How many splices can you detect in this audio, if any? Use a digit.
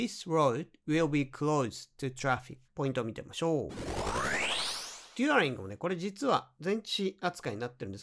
1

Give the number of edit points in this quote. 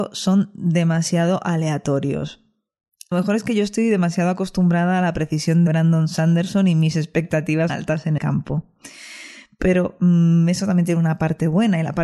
4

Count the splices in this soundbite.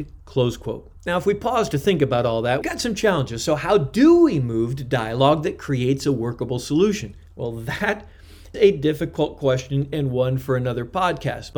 3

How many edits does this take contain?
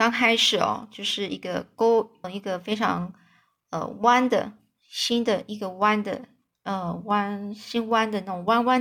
1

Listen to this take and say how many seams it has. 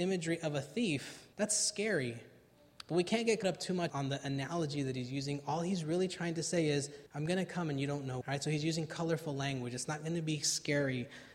5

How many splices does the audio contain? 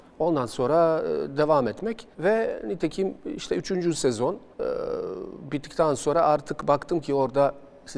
2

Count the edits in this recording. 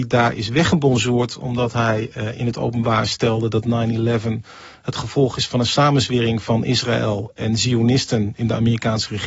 0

